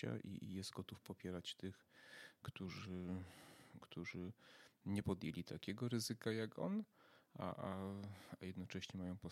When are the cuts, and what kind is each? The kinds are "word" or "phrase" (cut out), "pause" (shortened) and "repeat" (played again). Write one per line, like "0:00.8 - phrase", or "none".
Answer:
none